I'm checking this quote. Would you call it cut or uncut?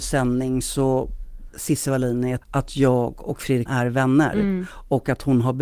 cut